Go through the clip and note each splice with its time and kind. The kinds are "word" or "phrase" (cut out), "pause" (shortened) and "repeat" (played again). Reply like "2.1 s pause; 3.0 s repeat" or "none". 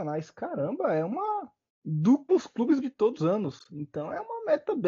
2.3 s word; 2.8 s word; 3.2 s word